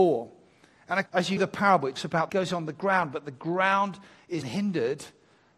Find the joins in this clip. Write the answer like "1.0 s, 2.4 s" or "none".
1.1 s, 1.4 s, 2.0 s, 2.3 s, 4.4 s